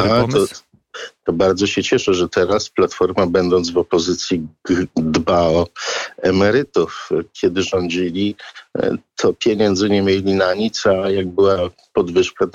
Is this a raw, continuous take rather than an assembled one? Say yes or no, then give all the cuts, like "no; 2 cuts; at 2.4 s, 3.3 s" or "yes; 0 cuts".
yes; 0 cuts